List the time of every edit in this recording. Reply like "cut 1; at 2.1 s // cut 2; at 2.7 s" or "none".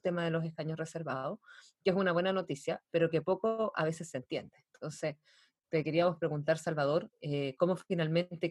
none